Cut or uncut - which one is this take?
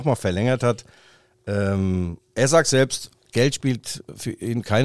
cut